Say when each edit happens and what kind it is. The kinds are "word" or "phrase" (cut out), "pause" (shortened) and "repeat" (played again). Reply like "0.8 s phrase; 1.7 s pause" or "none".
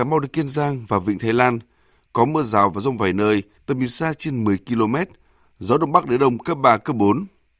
none